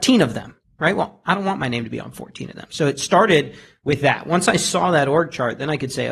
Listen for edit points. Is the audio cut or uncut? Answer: uncut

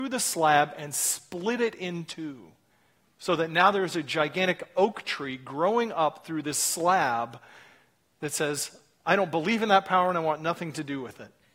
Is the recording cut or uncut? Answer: uncut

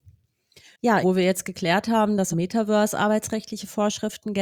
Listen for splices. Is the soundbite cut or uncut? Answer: cut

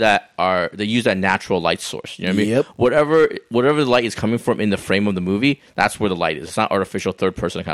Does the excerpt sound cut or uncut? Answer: uncut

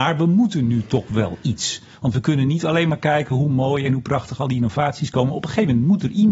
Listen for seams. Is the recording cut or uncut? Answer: uncut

